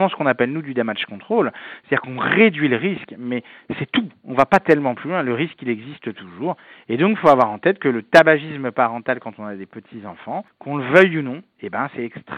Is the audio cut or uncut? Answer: uncut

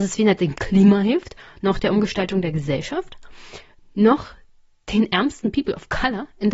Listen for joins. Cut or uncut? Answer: uncut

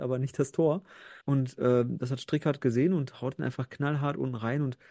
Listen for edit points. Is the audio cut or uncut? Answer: cut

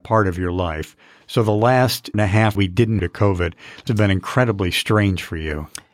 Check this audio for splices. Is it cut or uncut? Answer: cut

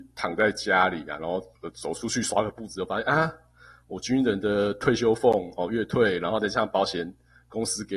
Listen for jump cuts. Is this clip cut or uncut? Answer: cut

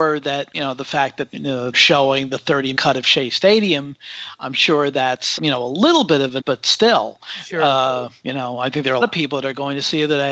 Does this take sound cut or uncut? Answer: cut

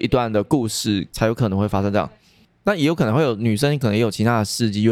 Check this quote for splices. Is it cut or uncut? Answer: uncut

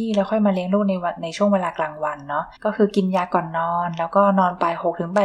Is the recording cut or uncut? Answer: cut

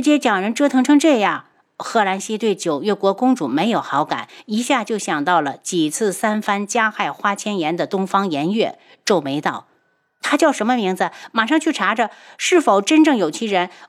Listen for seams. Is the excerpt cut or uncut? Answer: uncut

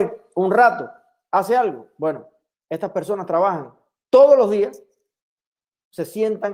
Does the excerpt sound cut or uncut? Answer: uncut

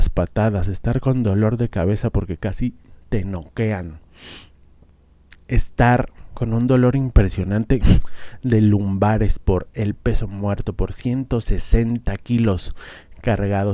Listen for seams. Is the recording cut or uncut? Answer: uncut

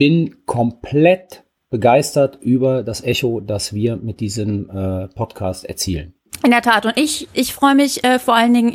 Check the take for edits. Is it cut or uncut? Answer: uncut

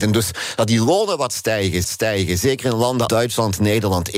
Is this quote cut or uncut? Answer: cut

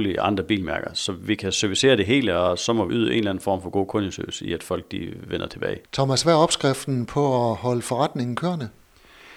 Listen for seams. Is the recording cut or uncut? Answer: cut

